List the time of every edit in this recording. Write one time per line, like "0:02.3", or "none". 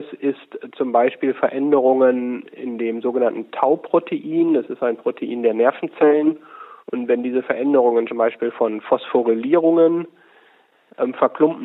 0:06.8
0:08.1